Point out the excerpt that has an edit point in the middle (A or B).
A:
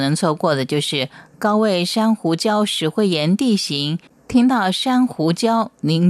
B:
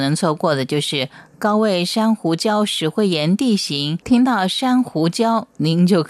B